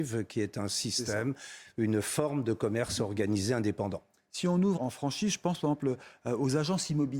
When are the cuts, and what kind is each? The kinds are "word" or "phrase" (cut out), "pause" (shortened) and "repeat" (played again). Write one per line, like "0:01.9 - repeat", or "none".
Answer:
0:04.8 - phrase